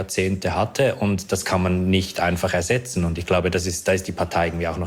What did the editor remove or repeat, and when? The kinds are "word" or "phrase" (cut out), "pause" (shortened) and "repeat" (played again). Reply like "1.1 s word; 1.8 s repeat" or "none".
none